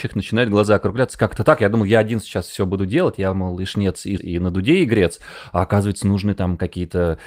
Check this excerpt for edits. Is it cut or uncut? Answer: cut